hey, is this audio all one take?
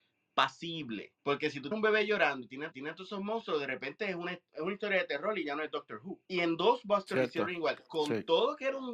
no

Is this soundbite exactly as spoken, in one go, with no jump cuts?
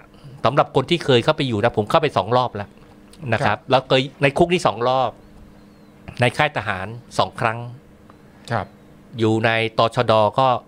no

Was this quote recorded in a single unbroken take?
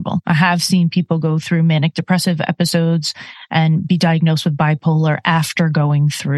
yes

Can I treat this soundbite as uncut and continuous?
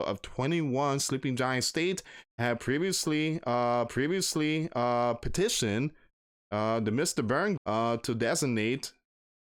no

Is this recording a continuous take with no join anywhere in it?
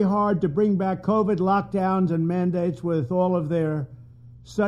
yes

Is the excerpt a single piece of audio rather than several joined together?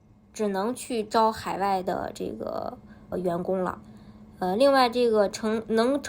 no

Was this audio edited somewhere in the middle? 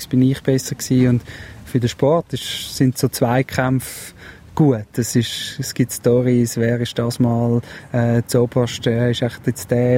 no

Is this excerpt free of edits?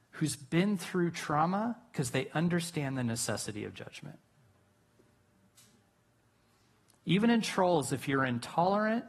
yes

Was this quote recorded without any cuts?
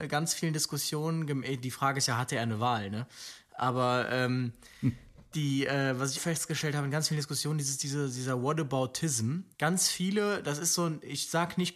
no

